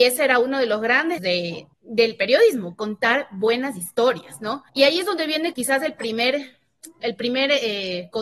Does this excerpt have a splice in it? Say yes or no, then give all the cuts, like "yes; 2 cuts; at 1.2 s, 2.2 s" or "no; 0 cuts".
yes; 5 cuts; at 1.2 s, 1.7 s, 4.7 s, 5.5 s, 7.0 s